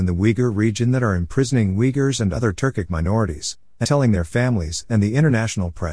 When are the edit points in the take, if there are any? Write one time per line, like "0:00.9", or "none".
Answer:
0:03.8